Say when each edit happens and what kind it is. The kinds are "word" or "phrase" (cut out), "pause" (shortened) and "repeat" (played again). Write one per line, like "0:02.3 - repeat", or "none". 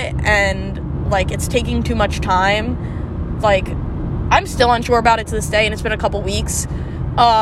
none